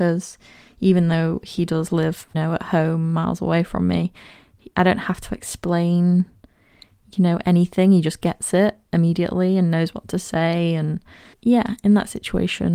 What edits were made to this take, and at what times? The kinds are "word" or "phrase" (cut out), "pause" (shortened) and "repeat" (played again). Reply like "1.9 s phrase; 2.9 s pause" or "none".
2.3 s word; 11.3 s word